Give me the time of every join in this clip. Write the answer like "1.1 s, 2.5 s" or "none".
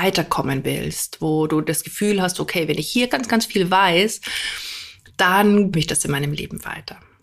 3.1 s, 5.7 s